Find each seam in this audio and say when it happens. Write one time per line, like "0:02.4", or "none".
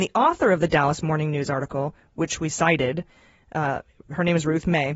none